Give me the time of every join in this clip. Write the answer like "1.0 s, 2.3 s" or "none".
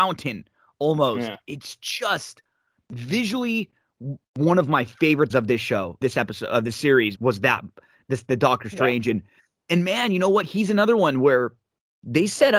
5.3 s, 6.0 s, 7.2 s